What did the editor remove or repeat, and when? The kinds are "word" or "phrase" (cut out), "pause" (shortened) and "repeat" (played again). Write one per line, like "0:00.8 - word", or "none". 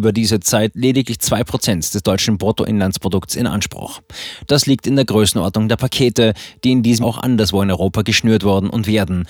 0:07.0 - word